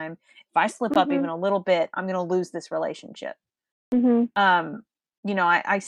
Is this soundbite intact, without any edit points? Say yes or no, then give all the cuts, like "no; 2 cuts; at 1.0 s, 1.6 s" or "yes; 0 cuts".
yes; 0 cuts